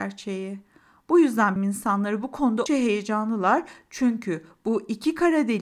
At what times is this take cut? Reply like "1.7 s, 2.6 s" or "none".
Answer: 1.6 s, 2.7 s

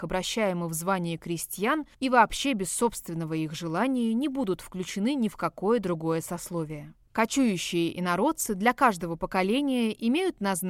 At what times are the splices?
1.9 s, 7.0 s

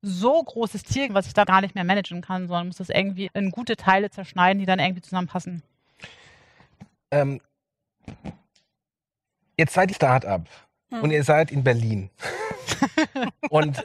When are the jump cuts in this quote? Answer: 1.1 s, 1.4 s, 3.3 s, 9.9 s

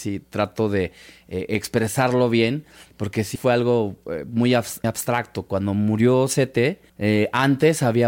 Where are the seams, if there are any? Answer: 3.4 s, 4.8 s, 6.9 s

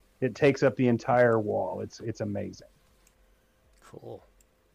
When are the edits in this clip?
none

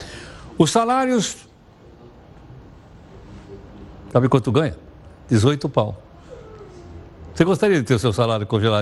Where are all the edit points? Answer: none

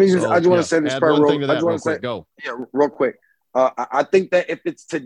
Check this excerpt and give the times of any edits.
2.3 s

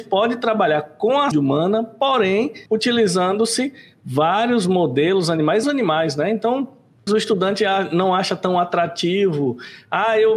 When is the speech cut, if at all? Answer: 1.3 s, 2.7 s, 5.6 s, 7.1 s

